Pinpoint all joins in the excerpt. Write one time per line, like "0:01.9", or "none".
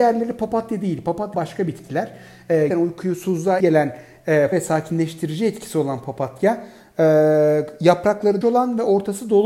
0:01.3
0:02.7
0:03.6
0:04.5
0:08.4